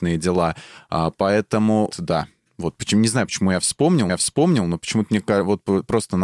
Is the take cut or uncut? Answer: cut